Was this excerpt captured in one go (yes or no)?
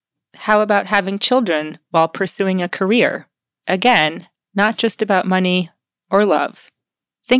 yes